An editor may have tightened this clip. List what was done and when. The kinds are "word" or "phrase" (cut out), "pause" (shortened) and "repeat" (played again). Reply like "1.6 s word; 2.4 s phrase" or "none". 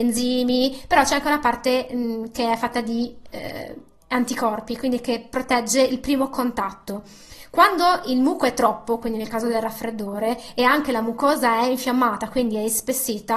none